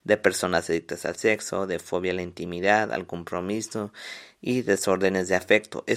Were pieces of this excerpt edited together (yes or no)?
no